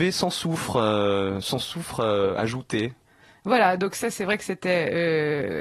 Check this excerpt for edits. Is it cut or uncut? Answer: uncut